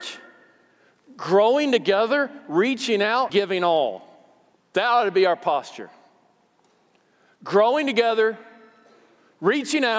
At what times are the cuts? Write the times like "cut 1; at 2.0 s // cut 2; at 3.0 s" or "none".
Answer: cut 1; at 3.3 s // cut 2; at 4.5 s